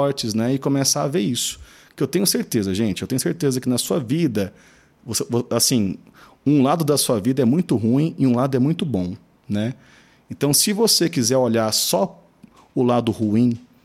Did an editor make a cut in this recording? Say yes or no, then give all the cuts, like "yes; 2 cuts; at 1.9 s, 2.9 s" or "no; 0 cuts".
no; 0 cuts